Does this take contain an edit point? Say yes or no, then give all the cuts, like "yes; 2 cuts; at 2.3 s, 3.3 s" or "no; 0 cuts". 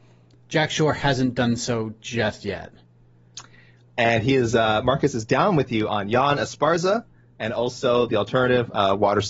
no; 0 cuts